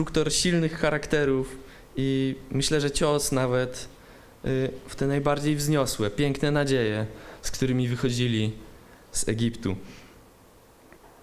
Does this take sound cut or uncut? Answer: uncut